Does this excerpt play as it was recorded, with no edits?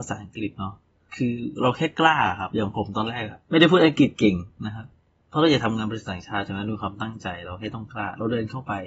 yes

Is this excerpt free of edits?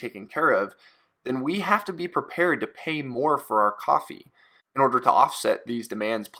yes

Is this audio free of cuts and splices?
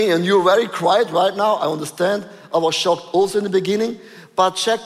yes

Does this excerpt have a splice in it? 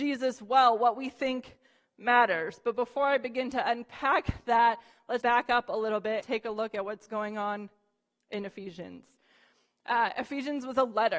yes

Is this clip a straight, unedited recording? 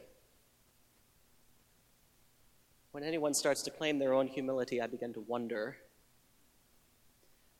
yes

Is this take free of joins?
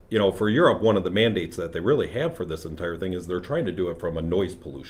yes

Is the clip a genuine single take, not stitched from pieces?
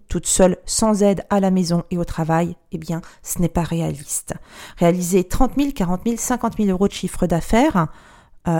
yes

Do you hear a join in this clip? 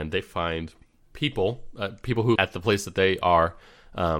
yes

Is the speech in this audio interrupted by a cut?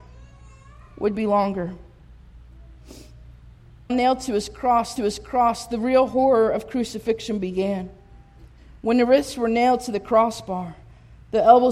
yes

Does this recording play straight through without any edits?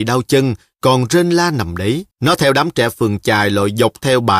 no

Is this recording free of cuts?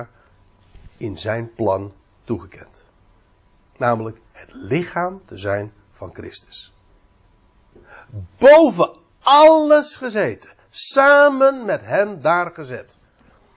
yes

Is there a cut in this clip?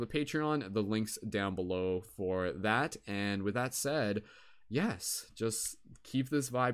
no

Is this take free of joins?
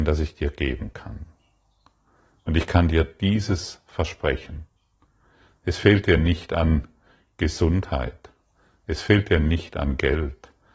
yes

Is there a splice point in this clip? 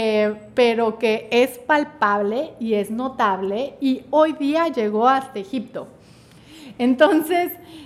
no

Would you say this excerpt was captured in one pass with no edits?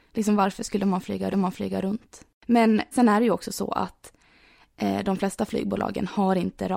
no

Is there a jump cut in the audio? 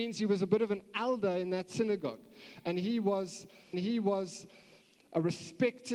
yes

